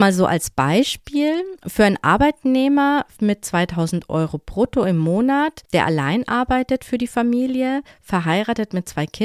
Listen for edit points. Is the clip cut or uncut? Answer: cut